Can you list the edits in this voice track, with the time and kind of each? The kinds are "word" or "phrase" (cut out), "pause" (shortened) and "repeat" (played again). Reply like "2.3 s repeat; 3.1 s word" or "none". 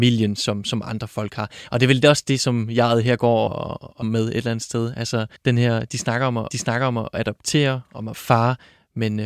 3.5 s word; 4.0 s word; 5.4 s pause; 6.5 s repeat; 8.1 s word